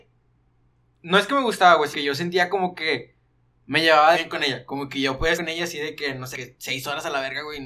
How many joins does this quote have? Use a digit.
4